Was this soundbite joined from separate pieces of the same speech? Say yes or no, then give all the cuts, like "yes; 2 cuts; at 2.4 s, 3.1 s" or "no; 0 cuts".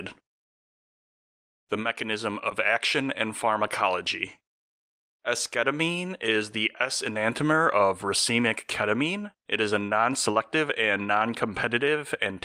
no; 0 cuts